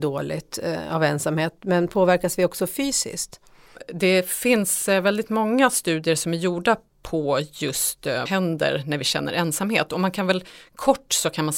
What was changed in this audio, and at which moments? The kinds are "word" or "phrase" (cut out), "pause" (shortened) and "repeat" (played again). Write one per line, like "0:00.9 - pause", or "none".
0:08.3 - phrase